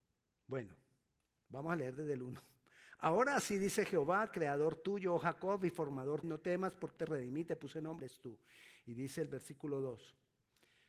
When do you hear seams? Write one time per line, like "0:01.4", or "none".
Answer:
0:06.2
0:07.0
0:08.0